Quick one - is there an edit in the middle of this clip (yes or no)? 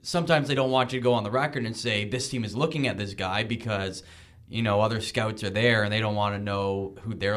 no